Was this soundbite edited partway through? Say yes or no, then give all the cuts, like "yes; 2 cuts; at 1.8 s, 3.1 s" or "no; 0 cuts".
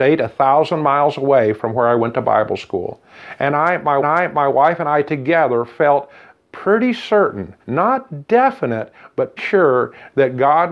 yes; 3 cuts; at 4.0 s, 7.6 s, 9.4 s